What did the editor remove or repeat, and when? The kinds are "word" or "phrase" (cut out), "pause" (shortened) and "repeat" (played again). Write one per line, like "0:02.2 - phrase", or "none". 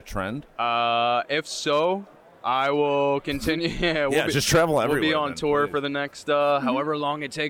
none